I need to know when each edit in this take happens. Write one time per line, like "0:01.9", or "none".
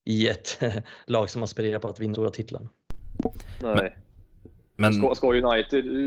0:02.1